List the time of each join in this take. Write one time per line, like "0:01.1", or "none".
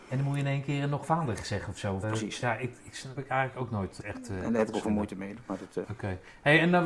0:01.0
0:02.0
0:03.2
0:04.0
0:04.8
0:05.8